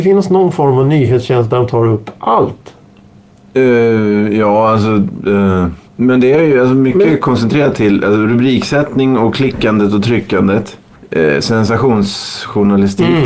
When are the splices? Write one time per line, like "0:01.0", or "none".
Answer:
0:05.8